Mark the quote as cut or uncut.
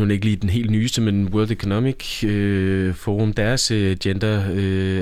uncut